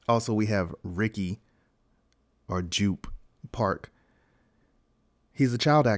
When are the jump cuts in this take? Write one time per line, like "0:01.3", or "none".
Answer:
none